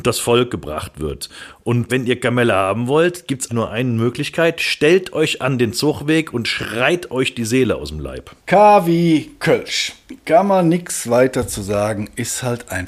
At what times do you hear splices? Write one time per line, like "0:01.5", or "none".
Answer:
0:01.9
0:03.5
0:08.4

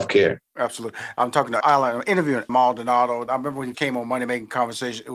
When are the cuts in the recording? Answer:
0:01.6
0:02.5
0:03.7

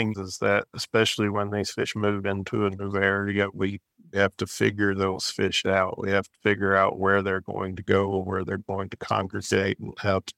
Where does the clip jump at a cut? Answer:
none

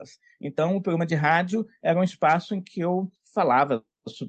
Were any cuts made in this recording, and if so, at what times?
none

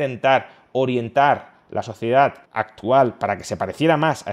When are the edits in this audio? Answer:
0:02.5

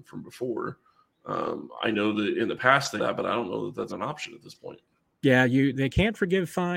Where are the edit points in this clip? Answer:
0:03.0
0:03.9
0:05.0
0:05.7

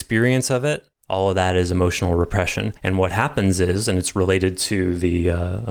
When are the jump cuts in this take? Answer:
0:00.9
0:02.8

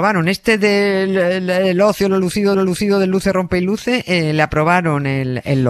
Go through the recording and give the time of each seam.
0:02.5

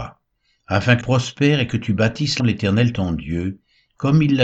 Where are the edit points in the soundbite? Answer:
0:01.0
0:02.4

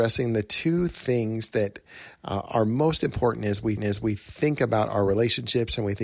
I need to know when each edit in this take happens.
0:03.8

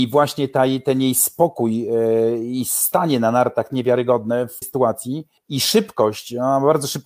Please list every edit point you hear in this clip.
0:03.7
0:04.6
0:05.4

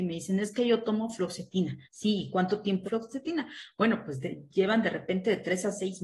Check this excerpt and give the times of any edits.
0:01.8
0:02.8

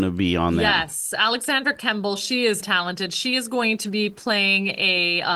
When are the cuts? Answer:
0:02.6

